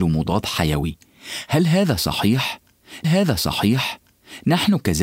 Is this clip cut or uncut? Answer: cut